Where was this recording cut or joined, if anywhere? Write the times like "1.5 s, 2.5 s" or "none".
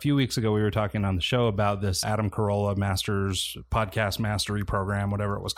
2.0 s